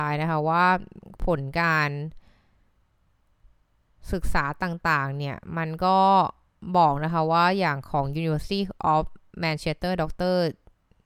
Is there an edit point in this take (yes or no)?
no